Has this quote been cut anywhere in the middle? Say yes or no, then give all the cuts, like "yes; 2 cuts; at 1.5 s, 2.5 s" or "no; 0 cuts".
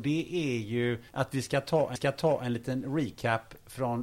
yes; 2 cuts; at 1.1 s, 2.0 s